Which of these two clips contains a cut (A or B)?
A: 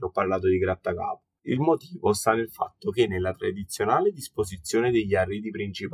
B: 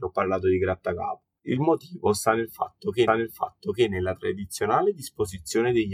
B